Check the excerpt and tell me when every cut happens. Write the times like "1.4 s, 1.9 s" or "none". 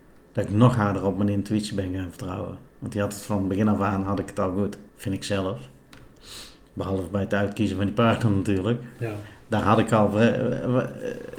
2.7 s, 4.9 s